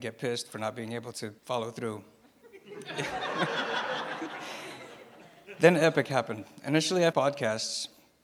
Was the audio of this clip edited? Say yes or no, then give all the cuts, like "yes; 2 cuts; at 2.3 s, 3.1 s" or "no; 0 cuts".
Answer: yes; 2 cuts; at 1.4 s, 7.1 s